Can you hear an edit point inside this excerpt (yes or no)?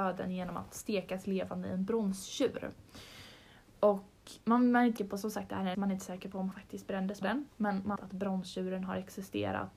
yes